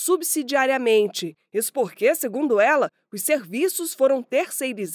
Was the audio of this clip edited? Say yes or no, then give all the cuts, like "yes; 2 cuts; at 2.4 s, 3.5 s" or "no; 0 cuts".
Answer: no; 0 cuts